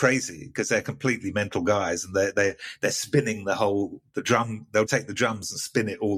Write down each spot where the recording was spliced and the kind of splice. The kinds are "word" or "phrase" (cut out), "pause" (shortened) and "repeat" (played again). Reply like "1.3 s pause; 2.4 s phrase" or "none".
4.9 s word

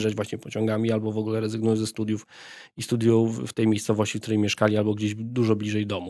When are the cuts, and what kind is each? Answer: none

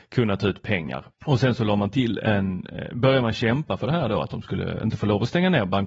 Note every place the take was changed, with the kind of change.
1.1 s pause

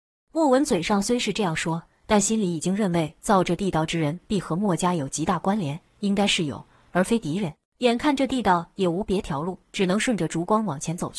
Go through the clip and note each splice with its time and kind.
7.6 s pause; 9.6 s pause

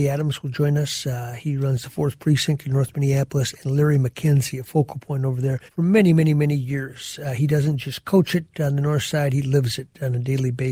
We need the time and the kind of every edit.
5.7 s pause

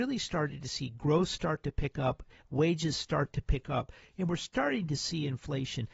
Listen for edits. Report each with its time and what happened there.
none

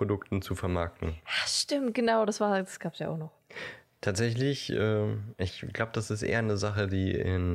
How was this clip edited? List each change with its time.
none

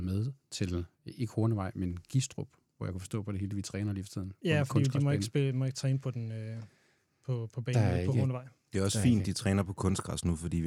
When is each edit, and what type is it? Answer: none

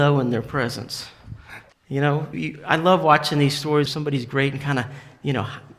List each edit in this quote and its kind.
1.7 s pause; 2.3 s word; 3.9 s phrase

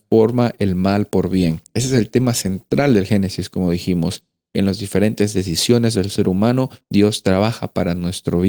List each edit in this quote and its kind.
6.8 s pause

